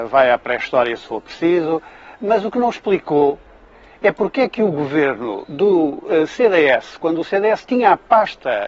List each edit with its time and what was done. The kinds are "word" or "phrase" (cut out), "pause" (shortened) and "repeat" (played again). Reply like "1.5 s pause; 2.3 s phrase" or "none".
none